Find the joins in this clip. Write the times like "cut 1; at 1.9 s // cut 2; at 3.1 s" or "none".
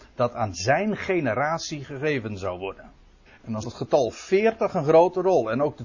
cut 1; at 3.3 s // cut 2; at 3.6 s